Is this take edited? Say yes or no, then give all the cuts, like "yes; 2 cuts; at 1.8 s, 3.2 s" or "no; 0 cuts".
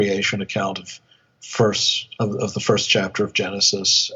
no; 0 cuts